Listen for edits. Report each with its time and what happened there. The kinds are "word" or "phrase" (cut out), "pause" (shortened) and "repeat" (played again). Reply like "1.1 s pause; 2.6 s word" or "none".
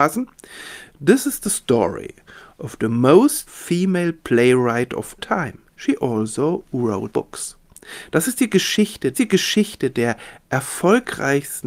3.5 s word; 5.2 s word; 5.7 s pause; 7.1 s word; 9.1 s repeat

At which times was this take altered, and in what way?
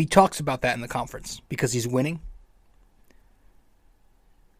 1.5 s pause

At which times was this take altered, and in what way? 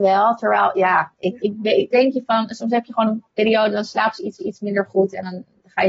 1.4 s word; 1.9 s word; 3.3 s pause; 4.4 s repeat

